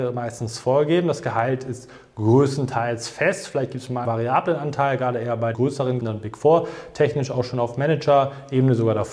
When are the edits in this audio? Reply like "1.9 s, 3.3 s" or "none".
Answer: 4.0 s, 5.5 s, 6.0 s